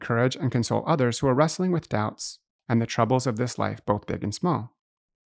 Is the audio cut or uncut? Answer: uncut